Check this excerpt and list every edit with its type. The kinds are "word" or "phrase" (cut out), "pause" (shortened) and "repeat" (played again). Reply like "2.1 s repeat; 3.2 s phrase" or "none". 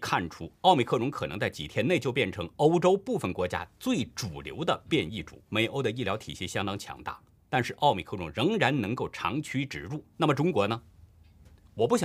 5.5 s pause; 7.4 s pause; 10.1 s pause

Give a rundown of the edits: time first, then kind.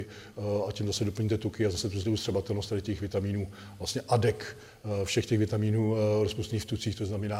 2.0 s word

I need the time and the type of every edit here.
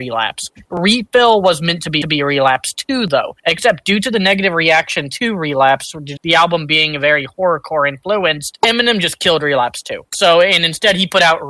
2.0 s repeat; 3.4 s pause; 6.2 s phrase

